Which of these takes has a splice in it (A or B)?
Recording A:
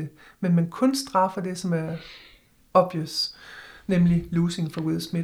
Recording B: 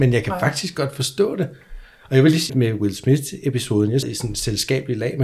B